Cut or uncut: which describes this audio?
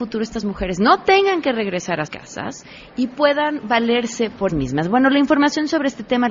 cut